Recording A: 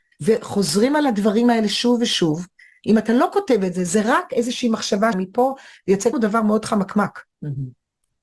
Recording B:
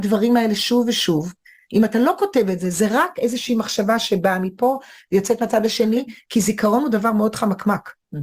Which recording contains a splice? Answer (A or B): A